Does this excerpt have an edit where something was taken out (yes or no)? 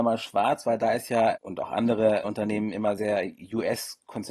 yes